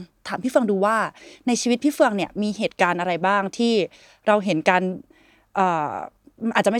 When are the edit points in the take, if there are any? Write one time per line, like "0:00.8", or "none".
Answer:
none